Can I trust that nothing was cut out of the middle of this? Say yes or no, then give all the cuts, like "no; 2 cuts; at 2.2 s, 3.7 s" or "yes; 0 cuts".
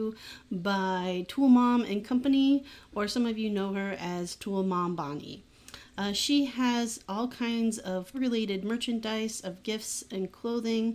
no; 1 cut; at 8.1 s